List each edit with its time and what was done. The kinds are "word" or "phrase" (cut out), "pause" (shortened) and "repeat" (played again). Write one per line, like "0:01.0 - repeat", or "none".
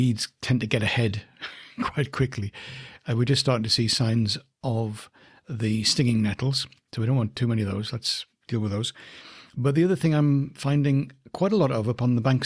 none